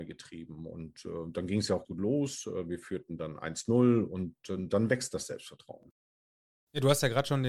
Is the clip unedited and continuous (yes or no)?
no